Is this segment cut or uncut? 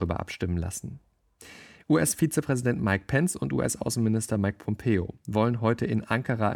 uncut